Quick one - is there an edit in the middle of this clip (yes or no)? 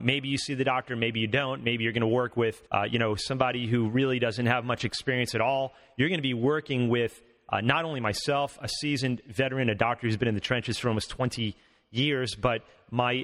yes